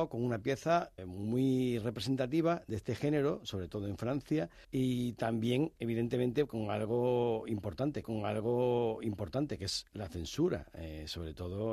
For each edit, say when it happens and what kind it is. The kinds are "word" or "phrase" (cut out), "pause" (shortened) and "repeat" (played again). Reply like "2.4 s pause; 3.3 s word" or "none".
1.0 s word; 4.6 s pause; 8.0 s repeat